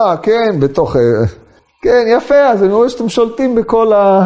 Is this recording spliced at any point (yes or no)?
no